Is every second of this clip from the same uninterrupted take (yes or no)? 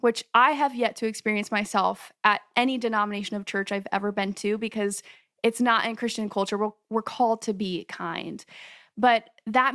yes